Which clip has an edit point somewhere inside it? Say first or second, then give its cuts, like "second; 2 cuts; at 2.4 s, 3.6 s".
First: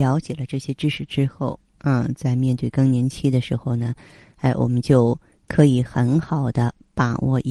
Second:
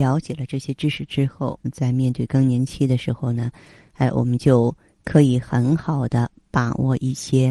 second; 1 cut; at 1.6 s